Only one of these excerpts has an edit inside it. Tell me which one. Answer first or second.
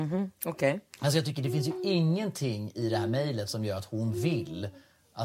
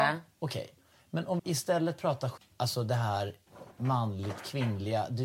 second